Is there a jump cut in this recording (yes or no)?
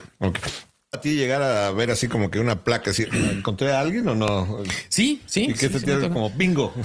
yes